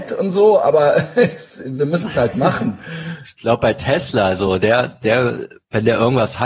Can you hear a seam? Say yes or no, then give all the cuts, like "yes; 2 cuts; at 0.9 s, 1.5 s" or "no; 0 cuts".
no; 0 cuts